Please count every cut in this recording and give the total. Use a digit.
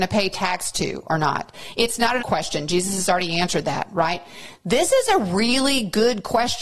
1